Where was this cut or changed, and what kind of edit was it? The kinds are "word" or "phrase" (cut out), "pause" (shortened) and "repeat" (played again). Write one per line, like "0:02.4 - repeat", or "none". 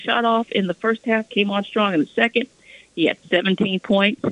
none